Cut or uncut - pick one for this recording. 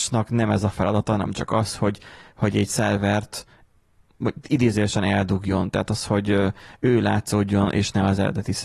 uncut